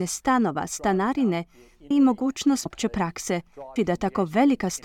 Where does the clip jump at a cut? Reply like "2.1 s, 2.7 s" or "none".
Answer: 1.9 s, 2.7 s, 3.8 s